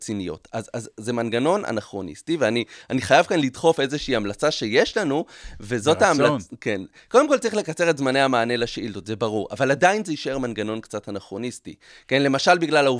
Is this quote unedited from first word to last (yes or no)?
yes